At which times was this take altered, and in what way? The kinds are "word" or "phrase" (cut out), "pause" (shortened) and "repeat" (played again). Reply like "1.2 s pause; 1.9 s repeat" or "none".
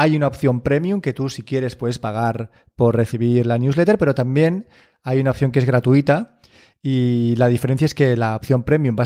none